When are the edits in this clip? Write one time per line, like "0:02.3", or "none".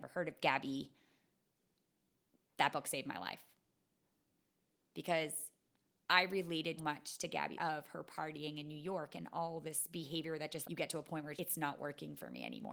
0:06.8
0:07.6
0:10.6
0:11.4

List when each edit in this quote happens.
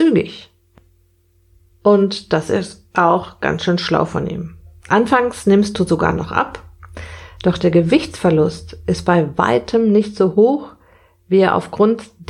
none

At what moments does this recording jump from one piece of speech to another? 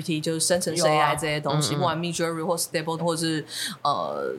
0:03.0

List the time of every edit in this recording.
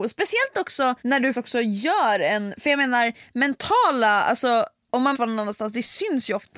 0:01.0
0:01.3
0:05.1

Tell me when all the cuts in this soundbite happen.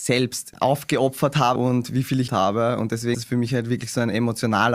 0:01.6
0:02.3
0:03.1

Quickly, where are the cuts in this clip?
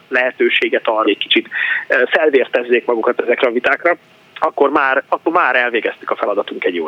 0:01.0
0:04.2

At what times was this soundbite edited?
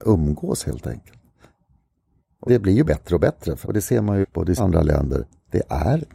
0:02.5
0:02.8
0:03.6
0:04.2
0:04.6

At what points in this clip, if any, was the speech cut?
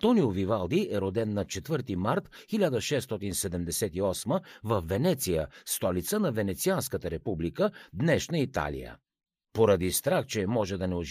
none

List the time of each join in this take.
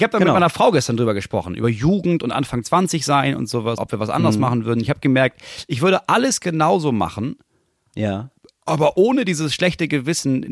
0:03.8
0:08.4

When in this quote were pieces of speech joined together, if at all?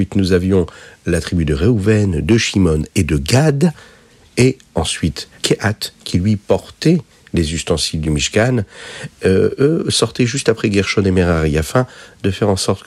0:05.4

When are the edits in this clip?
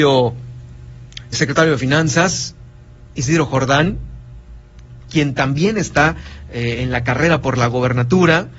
0:01.3

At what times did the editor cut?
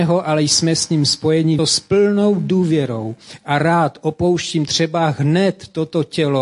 0:01.6

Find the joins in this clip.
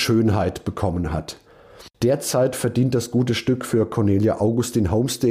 0:01.9

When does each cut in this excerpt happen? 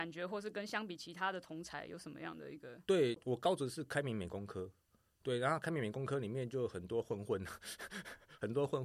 none

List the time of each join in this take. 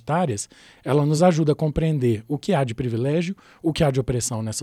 none

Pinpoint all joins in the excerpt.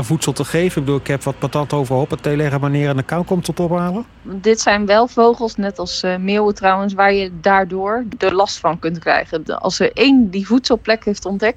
none

